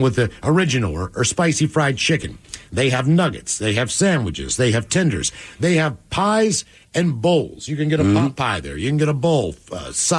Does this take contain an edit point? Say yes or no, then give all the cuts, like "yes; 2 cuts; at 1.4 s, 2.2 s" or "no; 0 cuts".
no; 0 cuts